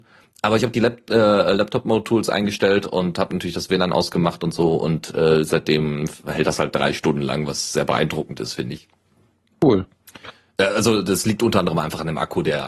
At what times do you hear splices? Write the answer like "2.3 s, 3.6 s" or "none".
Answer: none